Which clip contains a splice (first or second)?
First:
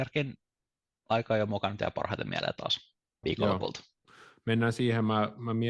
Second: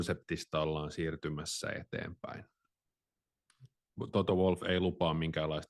first